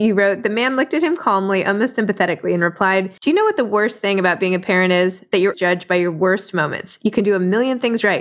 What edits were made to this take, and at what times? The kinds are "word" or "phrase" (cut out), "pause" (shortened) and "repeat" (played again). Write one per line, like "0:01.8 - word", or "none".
0:03.2 - pause
0:05.5 - word